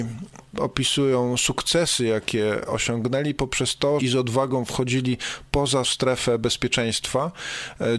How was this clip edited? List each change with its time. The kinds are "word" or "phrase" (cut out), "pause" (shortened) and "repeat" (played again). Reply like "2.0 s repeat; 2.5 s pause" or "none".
4.0 s phrase; 5.8 s word